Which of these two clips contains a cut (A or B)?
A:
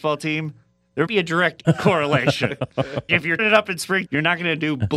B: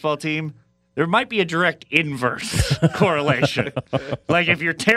A